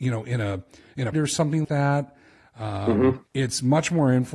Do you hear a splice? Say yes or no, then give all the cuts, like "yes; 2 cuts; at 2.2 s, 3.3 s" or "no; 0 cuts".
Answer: yes; 3 cuts; at 1.1 s, 1.6 s, 3.3 s